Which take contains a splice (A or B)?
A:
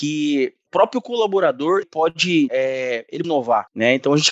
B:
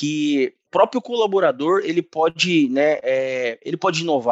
A